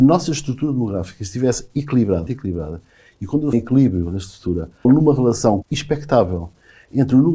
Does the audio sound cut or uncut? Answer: cut